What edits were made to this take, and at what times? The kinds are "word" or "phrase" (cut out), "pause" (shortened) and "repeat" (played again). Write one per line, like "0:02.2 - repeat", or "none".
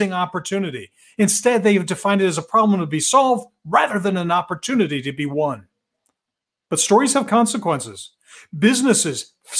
none